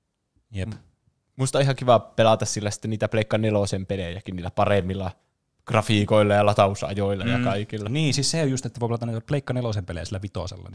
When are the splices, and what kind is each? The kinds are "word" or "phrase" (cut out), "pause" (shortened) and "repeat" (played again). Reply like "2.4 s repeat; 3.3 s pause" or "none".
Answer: none

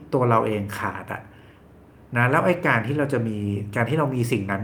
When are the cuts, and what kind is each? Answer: none

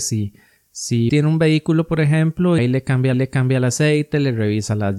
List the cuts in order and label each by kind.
1.1 s word; 2.6 s phrase; 3.1 s repeat

